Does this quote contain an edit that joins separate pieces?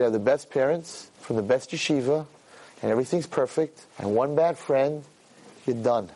yes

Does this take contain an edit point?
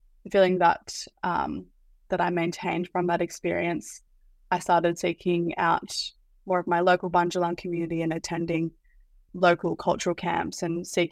no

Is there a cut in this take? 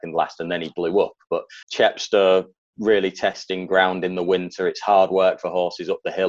yes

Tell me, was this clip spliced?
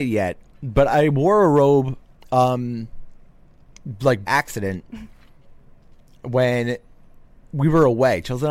yes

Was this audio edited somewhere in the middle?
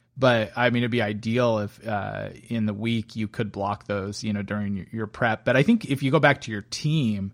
no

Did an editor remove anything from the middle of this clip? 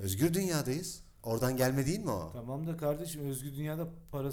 no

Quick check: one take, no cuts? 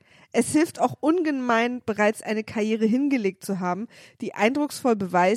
yes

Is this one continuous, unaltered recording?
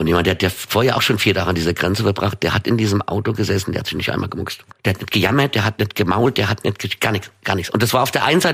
no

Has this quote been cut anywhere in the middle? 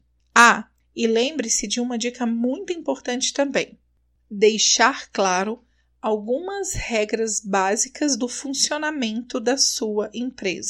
no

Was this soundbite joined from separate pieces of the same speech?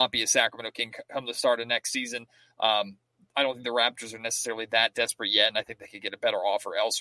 no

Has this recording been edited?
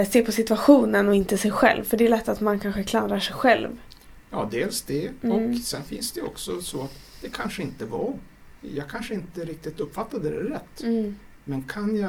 no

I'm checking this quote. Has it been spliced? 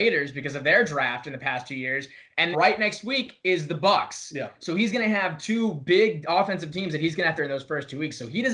yes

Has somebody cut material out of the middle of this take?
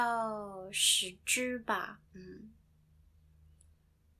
yes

